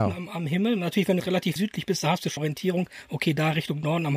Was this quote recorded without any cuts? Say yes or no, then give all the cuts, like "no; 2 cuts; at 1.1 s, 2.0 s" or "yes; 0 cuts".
no; 3 cuts; at 1.2 s, 1.6 s, 2.4 s